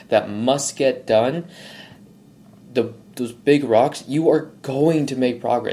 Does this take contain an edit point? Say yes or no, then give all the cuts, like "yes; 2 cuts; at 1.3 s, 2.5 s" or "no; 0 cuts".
no; 0 cuts